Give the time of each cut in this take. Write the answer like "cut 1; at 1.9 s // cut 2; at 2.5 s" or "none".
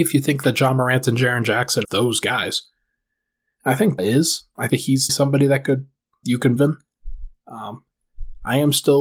cut 1; at 1.8 s // cut 2; at 4.0 s // cut 3; at 4.7 s // cut 4; at 5.1 s // cut 5; at 6.2 s // cut 6; at 6.6 s